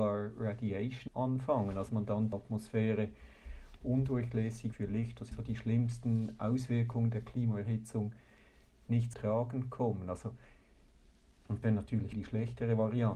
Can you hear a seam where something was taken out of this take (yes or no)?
yes